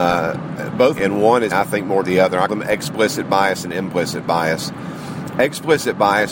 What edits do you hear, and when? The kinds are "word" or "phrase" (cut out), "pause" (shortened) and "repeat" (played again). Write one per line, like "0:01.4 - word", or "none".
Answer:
0:01.0 - phrase
0:01.5 - word
0:02.0 - phrase
0:02.5 - word